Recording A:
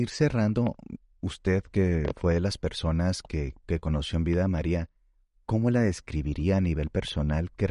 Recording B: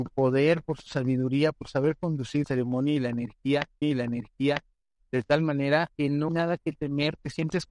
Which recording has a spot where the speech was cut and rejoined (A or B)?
B